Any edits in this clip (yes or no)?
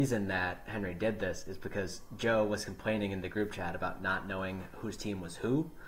no